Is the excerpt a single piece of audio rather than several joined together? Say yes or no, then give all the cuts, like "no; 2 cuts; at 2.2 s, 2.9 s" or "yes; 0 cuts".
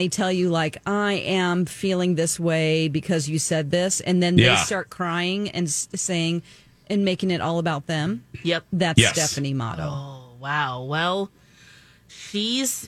yes; 0 cuts